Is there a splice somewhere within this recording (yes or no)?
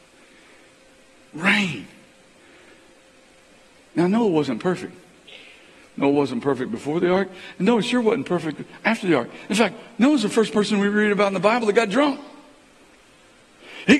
no